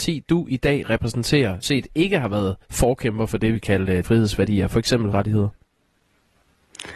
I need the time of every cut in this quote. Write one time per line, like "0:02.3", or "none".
0:01.6
0:02.6
0:03.5
0:04.0
0:05.1

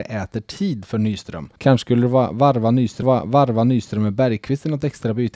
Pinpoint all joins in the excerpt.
0:01.6
0:03.0

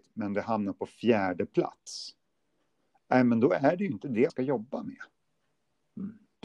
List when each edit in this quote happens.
0:04.3

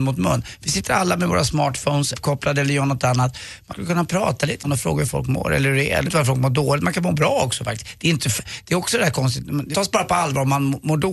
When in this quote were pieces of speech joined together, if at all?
0:02.1
0:03.7
0:04.6
0:06.0
0:09.7

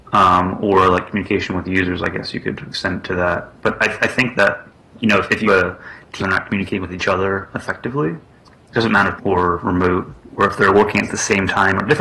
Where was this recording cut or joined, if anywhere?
0:04.7
0:05.4
0:06.2
0:09.2

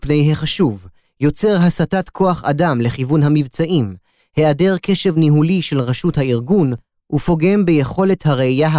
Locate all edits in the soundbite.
none

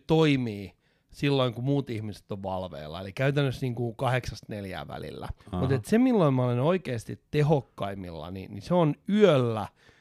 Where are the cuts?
0:05.4

